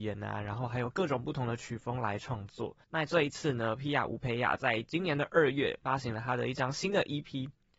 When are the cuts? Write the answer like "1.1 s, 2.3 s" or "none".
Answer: 2.8 s

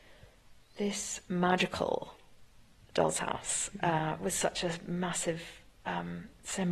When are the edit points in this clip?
none

